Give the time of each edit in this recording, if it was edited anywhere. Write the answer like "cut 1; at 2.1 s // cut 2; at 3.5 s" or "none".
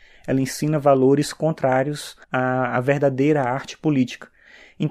cut 1; at 2.2 s

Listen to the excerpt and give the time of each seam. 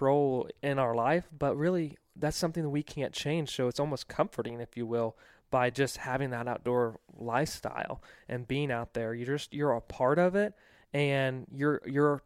none

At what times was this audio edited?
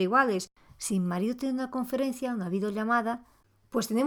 none

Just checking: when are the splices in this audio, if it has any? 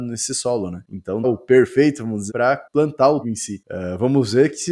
cut 1; at 1.2 s // cut 2; at 2.3 s // cut 3; at 3.2 s

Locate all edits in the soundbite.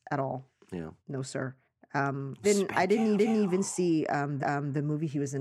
cut 1; at 1.0 s // cut 2; at 2.4 s // cut 3; at 3.2 s // cut 4; at 4.4 s

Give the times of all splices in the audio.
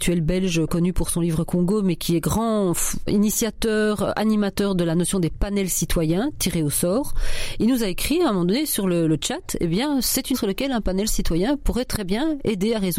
cut 1; at 10.3 s

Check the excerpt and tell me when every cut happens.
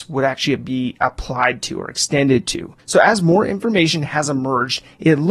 none

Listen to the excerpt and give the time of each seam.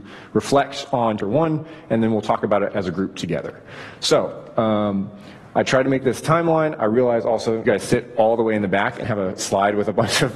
cut 1; at 1.2 s // cut 2; at 7.7 s // cut 3; at 9.0 s

